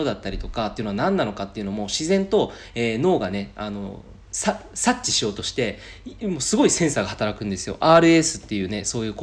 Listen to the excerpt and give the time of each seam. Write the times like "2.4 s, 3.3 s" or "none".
none